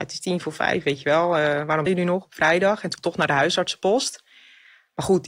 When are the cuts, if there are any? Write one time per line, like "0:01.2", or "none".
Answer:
0:01.9
0:03.0